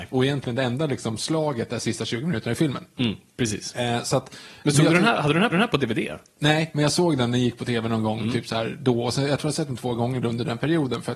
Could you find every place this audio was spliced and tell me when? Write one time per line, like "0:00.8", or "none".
0:05.5